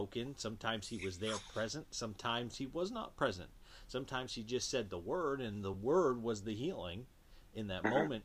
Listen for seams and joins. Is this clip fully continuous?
yes; 0 cuts

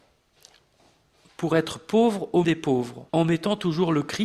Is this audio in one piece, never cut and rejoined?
no; 2 cuts; at 2.4 s, 3.1 s

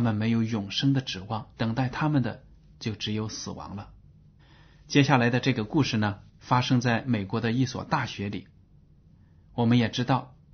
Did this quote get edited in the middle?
yes; 3 cuts; at 1.5 s, 4.4 s, 6.3 s

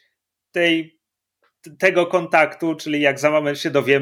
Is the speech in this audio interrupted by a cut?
no; 0 cuts

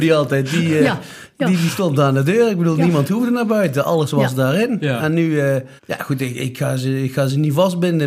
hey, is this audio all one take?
no; 1 cut; at 5.8 s

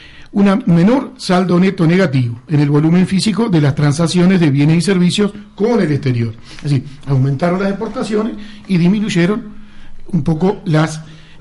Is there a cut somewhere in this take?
no; 0 cuts

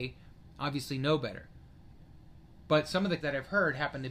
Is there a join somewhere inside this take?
yes; 1 cut; at 3.2 s

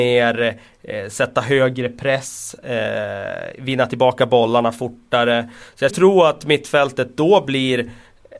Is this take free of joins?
no; 1 cut; at 5.9 s

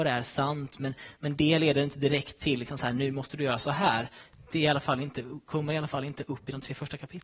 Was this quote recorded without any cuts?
yes; 0 cuts

